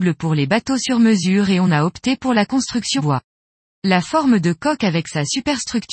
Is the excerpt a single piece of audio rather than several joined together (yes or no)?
no